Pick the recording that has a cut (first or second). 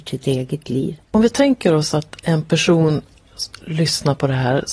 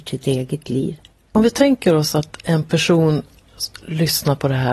first